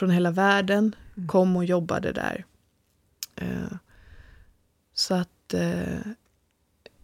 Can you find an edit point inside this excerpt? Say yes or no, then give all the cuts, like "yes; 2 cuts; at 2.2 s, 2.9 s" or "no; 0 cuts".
no; 0 cuts